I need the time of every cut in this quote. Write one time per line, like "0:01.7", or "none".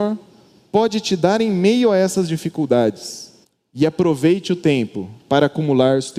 0:03.4